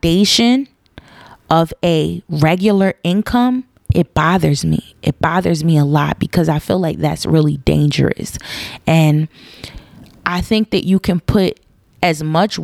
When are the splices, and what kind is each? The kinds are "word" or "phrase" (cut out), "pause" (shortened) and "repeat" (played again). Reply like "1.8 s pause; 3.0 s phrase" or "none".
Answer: none

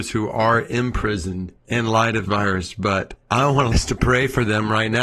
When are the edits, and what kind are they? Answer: 1.6 s pause; 2.2 s word; 3.2 s pause; 3.7 s word

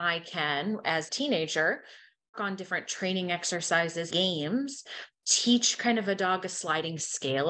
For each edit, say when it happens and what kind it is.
1.1 s word; 2.3 s word; 4.1 s word; 5.1 s word

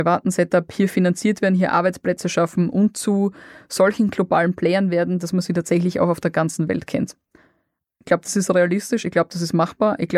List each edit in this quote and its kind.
none

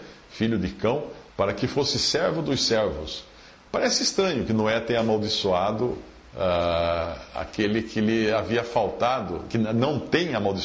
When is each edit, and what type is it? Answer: 1.3 s pause

